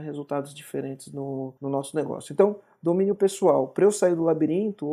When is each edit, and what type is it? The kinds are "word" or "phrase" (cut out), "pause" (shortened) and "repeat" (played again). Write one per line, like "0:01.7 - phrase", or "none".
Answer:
0:01.6 - pause